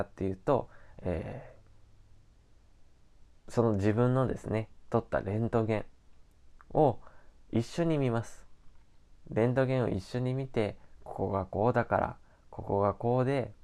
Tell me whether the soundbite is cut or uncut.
uncut